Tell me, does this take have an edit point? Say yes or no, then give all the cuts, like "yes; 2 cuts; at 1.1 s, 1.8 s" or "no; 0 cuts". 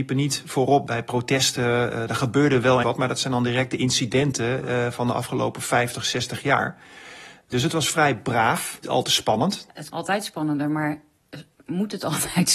yes; 3 cuts; at 2.8 s, 8.8 s, 9.9 s